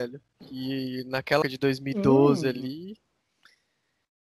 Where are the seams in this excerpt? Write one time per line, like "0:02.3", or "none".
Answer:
0:01.4

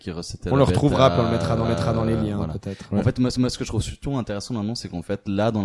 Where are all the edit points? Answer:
0:01.6
0:03.3

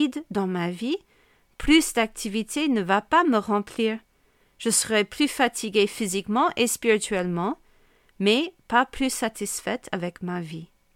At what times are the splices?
none

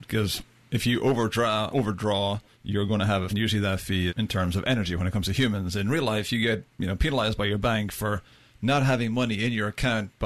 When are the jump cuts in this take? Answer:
0:01.7
0:02.5
0:03.3
0:04.1
0:06.7

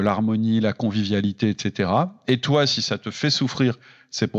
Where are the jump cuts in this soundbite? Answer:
none

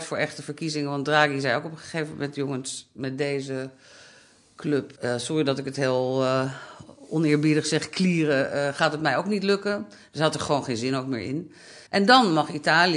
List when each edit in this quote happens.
0:05.0
0:11.9

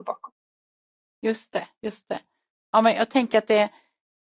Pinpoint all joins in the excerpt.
none

